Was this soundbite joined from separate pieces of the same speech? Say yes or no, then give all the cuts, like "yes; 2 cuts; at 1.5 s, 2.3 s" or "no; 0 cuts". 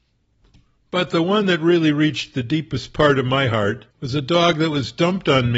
yes; 1 cut; at 3.9 s